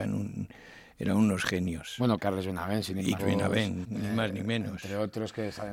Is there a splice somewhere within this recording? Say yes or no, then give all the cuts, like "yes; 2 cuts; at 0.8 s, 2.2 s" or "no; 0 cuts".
yes; 3 cuts; at 2.2 s, 3.2 s, 3.8 s